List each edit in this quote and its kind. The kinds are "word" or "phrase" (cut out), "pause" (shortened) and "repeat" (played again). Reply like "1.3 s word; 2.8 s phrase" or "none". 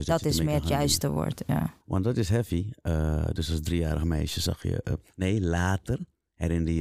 1.8 s pause